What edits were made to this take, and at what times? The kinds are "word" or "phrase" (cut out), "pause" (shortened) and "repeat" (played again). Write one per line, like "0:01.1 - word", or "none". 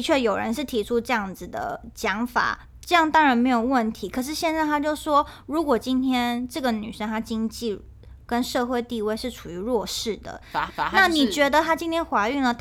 0:10.7 - repeat